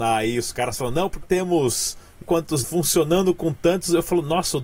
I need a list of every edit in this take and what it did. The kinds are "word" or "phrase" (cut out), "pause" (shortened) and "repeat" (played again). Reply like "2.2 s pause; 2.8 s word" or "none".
1.2 s word; 2.2 s word; 2.6 s word

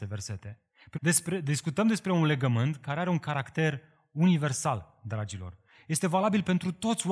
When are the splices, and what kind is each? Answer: 0.9 s word

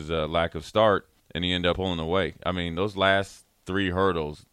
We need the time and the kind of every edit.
1.2 s pause; 1.7 s word

